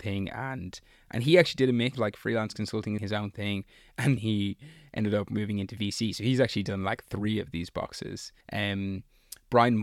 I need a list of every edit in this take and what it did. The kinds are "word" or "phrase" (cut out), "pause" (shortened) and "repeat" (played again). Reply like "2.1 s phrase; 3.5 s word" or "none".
1.9 s word; 3.0 s phrase; 4.2 s word; 8.4 s pause